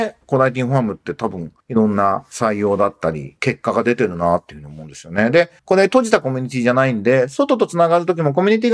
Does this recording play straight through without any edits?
no; 2 cuts; at 1.6 s, 5.6 s

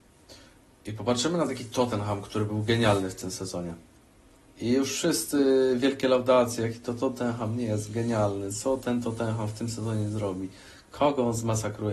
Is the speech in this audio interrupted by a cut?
no; 0 cuts

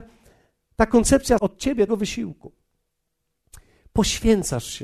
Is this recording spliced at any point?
yes; 2 cuts; at 1.4 s, 1.9 s

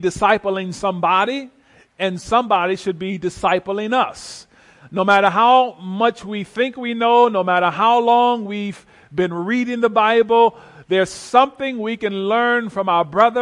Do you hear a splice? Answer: no; 0 cuts

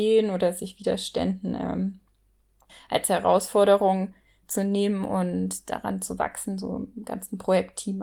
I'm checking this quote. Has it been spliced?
no; 0 cuts

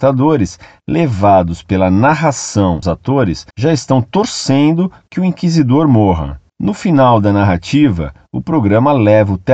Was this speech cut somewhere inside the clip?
yes; 3 cuts; at 2.8 s, 3.5 s, 6.5 s

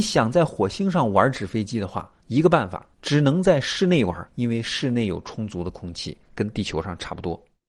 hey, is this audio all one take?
no; 3 cuts; at 2.2 s, 2.9 s, 4.3 s

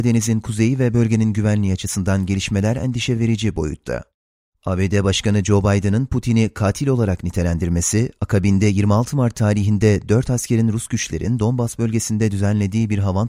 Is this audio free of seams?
yes; 0 cuts

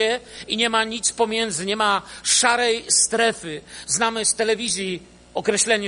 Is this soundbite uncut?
yes; 0 cuts

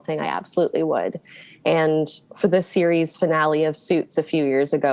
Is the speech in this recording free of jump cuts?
yes; 0 cuts

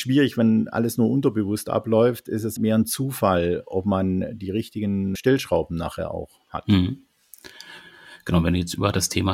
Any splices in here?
yes; 2 cuts; at 2.6 s, 5.2 s

